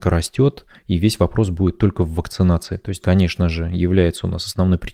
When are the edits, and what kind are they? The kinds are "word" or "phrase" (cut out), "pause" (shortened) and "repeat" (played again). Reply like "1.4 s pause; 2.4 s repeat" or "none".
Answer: 3.0 s word